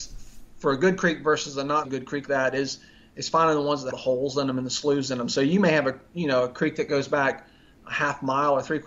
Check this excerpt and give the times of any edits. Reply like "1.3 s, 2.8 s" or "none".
1.8 s, 2.3 s, 3.9 s

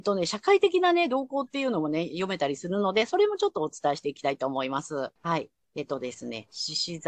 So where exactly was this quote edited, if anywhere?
5.2 s

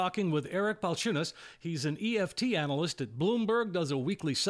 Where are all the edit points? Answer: none

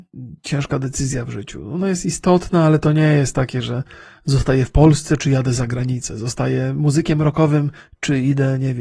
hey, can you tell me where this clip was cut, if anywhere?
none

